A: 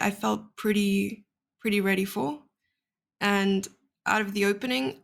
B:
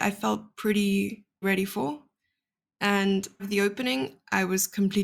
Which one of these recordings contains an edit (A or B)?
B